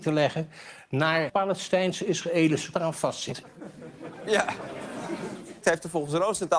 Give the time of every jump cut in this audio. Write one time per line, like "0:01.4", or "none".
0:01.3
0:02.7
0:05.6